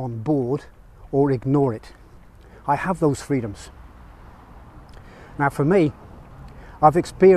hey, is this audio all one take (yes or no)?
yes